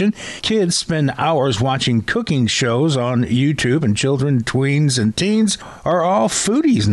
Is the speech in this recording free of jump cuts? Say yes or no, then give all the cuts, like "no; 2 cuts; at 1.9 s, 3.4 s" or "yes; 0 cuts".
yes; 0 cuts